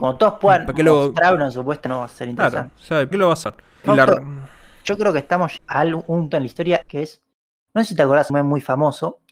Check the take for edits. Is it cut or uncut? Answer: cut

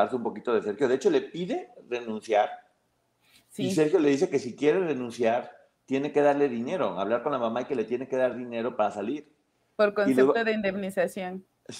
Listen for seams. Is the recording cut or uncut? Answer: uncut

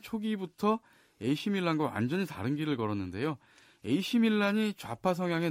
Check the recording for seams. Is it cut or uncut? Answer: uncut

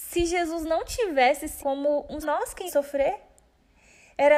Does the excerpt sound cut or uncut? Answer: cut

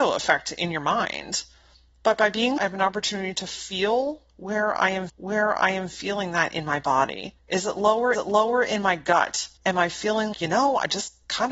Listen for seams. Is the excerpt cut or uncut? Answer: cut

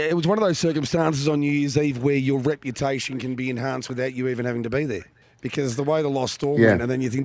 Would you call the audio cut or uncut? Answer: cut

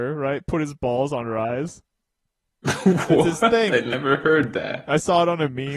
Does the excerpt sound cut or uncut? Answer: uncut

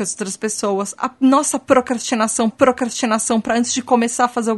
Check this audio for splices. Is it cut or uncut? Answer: cut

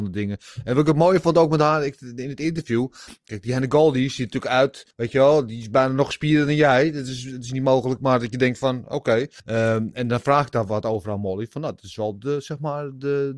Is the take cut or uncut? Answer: cut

